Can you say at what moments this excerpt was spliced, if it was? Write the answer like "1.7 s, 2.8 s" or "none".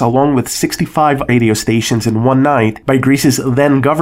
1.3 s